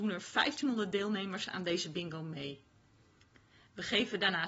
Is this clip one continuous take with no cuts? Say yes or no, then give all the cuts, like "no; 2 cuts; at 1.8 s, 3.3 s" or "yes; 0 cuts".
yes; 0 cuts